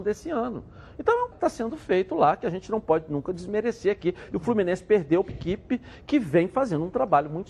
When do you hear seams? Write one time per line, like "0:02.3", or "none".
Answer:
0:01.3
0:05.3